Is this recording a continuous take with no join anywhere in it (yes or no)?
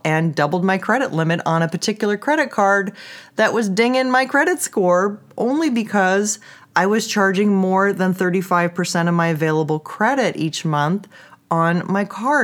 yes